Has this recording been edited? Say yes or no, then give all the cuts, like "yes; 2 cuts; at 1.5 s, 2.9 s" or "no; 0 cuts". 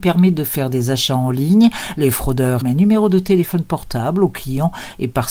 yes; 1 cut; at 2.6 s